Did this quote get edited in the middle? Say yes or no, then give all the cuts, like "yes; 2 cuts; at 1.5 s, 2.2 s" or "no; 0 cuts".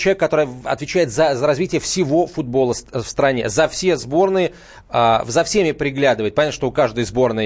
no; 0 cuts